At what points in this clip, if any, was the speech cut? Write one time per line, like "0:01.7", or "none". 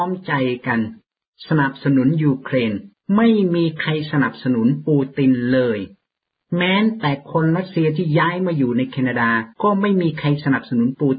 0:02.9
0:09.5